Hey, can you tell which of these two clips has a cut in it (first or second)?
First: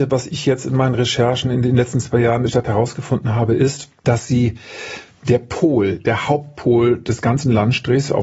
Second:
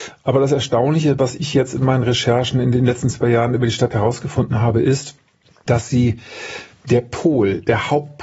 first